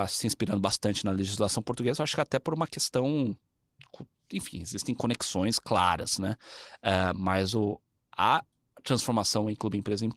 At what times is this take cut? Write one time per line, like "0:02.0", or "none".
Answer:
none